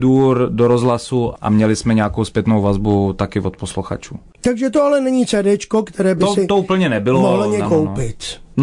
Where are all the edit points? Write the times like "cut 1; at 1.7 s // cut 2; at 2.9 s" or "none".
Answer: cut 1; at 7.6 s